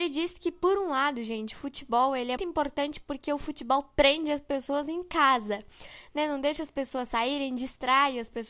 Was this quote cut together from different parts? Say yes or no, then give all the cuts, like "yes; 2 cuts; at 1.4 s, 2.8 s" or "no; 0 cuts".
yes; 1 cut; at 2.4 s